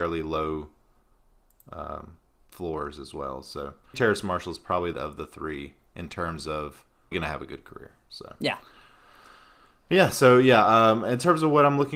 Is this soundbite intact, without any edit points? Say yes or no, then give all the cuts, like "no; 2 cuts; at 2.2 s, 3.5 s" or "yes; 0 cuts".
no; 4 cuts; at 2.4 s, 3.9 s, 4.9 s, 7.1 s